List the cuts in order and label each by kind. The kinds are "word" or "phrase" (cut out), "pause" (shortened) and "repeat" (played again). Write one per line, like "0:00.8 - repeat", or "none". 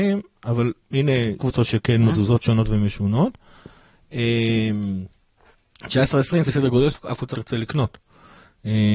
0:01.4 - word
0:02.1 - word
0:06.5 - word
0:06.9 - phrase
0:07.3 - word